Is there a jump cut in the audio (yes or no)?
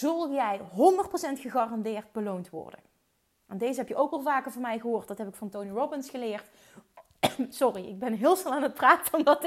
no